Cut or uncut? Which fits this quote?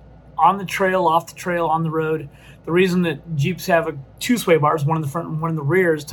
uncut